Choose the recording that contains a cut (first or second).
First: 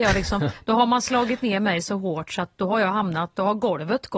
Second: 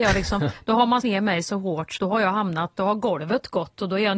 second